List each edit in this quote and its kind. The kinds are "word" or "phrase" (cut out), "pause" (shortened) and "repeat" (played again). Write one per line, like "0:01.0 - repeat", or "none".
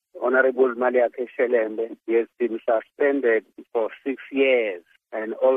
0:02.0 - pause